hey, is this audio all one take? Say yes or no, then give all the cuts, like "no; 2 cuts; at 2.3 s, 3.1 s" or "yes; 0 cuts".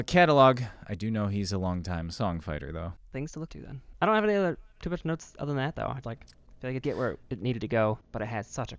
no; 3 cuts; at 3.5 s, 6.0 s, 6.8 s